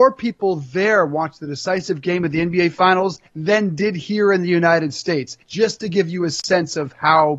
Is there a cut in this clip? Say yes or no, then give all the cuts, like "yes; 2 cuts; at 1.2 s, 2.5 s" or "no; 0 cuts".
yes; 2 cuts; at 3.3 s, 5.4 s